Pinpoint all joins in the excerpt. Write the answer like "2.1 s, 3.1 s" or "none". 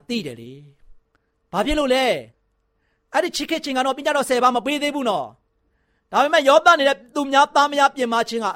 none